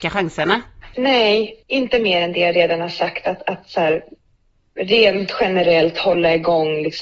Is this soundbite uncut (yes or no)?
yes